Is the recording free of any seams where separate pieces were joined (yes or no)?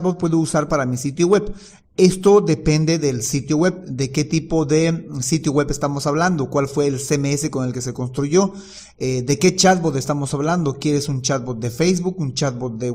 yes